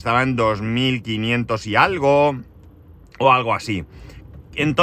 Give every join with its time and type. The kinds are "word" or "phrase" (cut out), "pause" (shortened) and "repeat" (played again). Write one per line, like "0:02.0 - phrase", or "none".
none

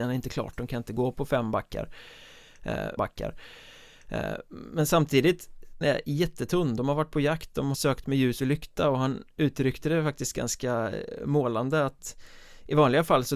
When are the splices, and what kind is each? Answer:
0:03.0 - repeat
0:05.8 - word
0:07.7 - word

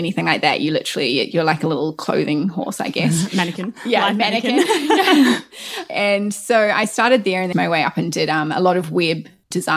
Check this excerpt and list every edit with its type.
0:07.5 - phrase

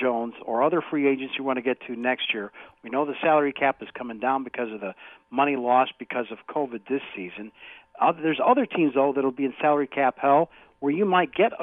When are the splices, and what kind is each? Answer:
none

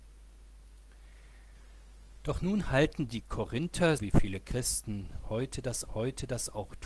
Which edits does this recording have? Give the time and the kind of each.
0:04.0 - word
0:05.9 - repeat

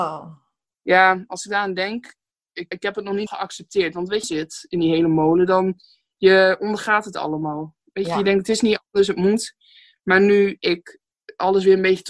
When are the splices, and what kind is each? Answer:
0:02.7 - word
0:03.3 - word
0:04.2 - phrase

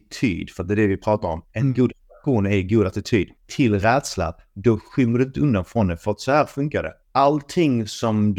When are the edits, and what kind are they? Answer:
0:01.5 - pause
0:03.4 - pause
0:07.0 - pause

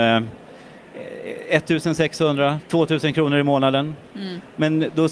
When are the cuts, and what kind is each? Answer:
none

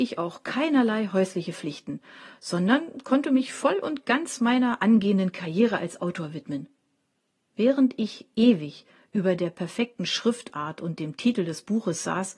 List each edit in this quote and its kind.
none

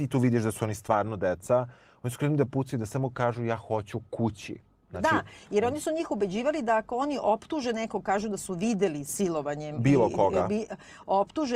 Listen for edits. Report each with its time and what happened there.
none

